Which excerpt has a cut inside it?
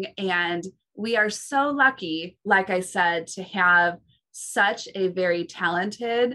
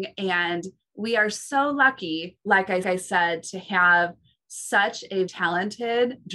second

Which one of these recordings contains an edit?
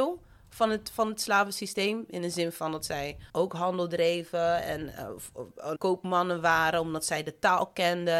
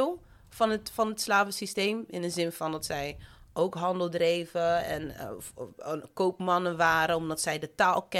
first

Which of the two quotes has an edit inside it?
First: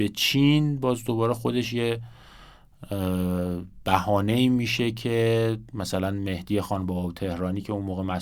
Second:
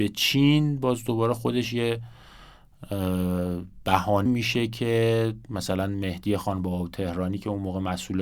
second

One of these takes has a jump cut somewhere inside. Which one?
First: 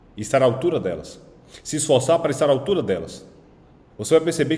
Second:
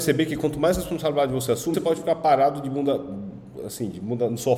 second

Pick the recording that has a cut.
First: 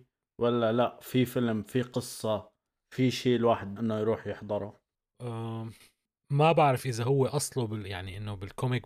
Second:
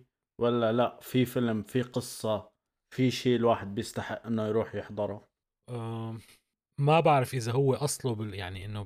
first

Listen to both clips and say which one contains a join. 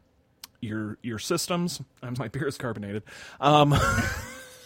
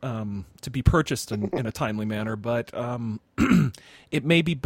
first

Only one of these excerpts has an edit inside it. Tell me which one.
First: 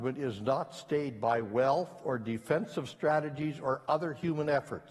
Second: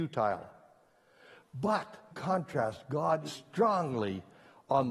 second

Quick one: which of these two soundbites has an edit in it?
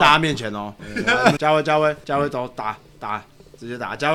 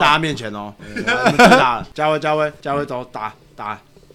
first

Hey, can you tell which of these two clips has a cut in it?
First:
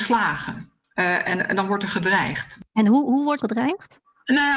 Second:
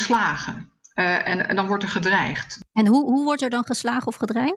first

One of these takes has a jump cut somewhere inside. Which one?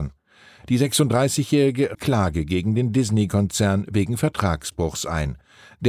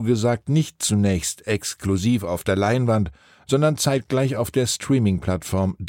first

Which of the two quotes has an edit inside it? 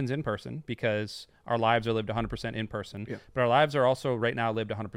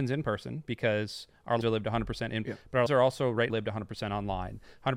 second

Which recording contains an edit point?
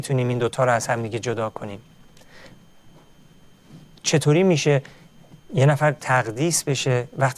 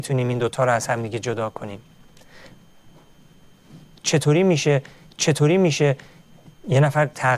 second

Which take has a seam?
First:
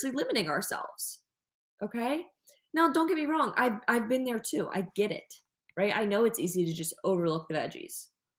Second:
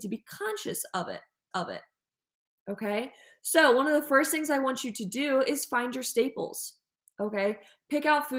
second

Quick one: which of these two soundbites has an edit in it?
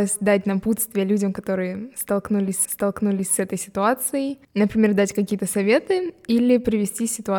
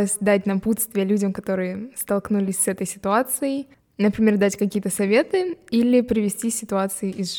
first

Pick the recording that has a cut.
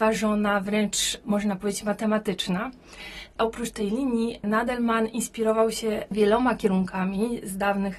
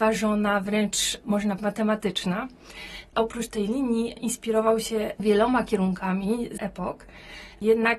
second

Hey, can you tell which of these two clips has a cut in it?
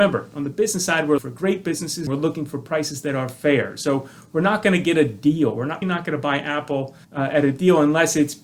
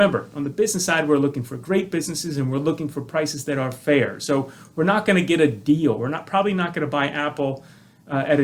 first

